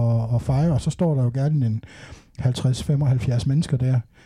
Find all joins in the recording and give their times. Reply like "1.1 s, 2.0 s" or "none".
none